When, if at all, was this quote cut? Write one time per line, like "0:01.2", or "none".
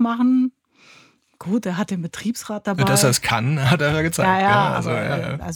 none